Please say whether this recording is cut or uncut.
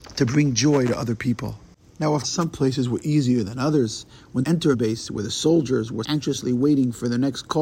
cut